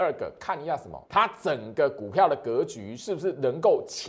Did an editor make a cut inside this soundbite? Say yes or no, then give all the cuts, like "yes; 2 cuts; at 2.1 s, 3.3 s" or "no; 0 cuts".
yes; 1 cut; at 1.1 s